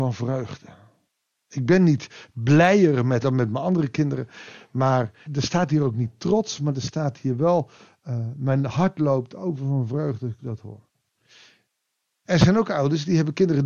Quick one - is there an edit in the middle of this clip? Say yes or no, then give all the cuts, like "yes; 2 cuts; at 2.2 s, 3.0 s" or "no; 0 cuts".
yes; 2 cuts; at 3.2 s, 5.3 s